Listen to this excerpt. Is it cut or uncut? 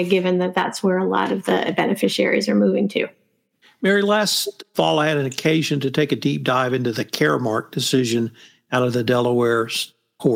uncut